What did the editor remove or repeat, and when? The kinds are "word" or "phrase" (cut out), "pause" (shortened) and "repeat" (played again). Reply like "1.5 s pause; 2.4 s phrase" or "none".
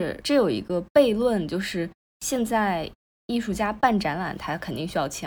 none